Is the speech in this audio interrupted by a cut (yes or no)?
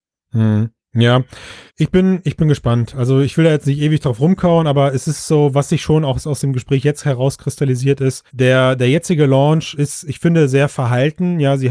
yes